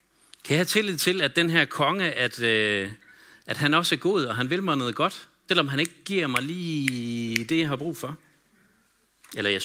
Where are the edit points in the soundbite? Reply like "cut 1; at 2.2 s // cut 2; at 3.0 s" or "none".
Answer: cut 1; at 5.5 s